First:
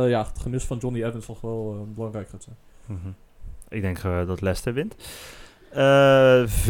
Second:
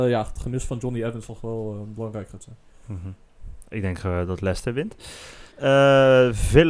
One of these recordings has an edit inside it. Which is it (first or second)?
second